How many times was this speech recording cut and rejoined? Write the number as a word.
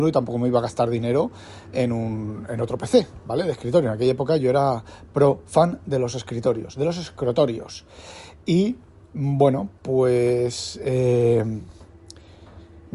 zero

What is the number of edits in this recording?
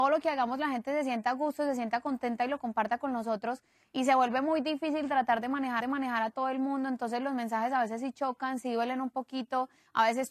one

